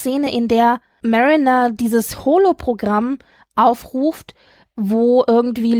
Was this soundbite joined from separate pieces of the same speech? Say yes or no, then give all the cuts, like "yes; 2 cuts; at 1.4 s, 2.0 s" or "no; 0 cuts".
no; 0 cuts